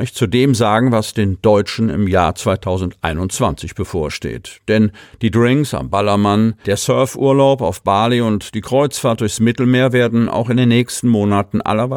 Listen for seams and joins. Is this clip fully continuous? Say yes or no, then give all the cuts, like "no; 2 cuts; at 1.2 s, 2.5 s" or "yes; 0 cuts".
yes; 0 cuts